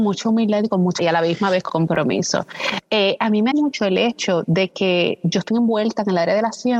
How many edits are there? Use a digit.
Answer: 4